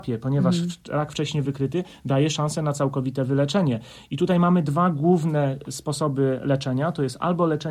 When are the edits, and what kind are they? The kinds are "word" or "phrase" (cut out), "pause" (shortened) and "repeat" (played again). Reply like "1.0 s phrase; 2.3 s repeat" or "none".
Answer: none